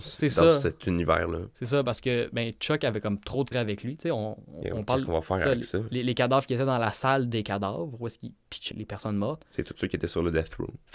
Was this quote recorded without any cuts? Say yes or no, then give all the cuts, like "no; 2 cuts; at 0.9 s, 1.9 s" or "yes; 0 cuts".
no; 2 cuts; at 3.5 s, 8.7 s